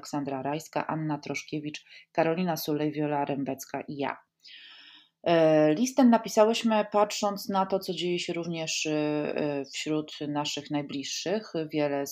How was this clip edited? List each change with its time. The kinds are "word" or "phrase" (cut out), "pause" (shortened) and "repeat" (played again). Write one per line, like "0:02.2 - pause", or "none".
none

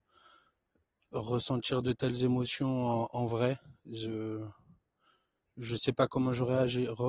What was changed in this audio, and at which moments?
none

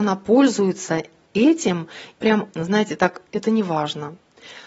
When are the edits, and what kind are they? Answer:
0:02.2 - word
0:02.5 - word
0:03.3 - word

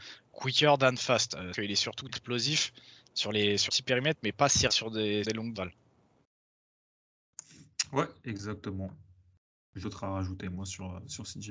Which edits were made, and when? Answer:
0:01.5 - word
0:02.1 - word
0:03.7 - word
0:04.7 - word
0:05.2 - word
0:05.5 - word
0:09.8 - word

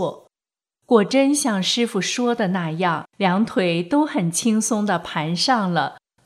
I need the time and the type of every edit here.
0:03.1 - pause

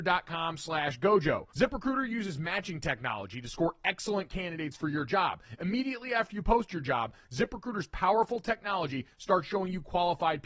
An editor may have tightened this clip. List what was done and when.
0:01.5 - pause

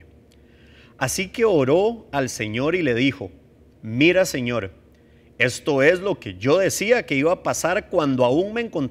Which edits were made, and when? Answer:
none

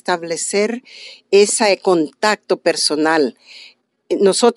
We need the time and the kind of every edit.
none

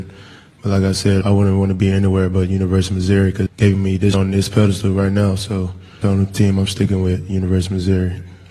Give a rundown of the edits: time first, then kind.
0:01.2 - word
0:03.5 - word
0:04.1 - phrase
0:06.0 - word

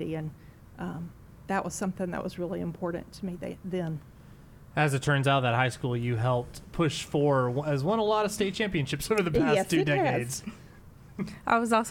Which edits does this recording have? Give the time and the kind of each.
0:06.6 - word

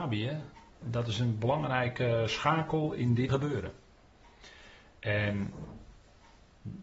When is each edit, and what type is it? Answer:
0:03.3 - word

